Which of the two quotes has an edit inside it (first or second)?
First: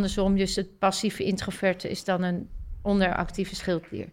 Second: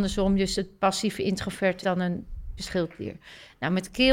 second